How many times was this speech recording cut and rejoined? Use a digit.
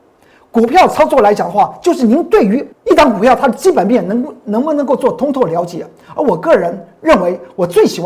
1